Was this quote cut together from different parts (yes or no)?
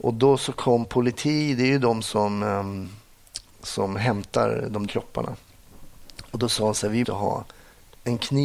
yes